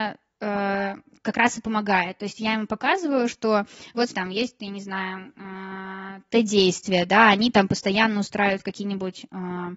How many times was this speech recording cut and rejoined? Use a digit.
1